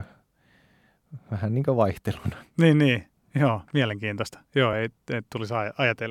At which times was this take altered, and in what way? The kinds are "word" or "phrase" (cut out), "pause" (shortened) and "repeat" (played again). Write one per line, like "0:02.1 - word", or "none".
none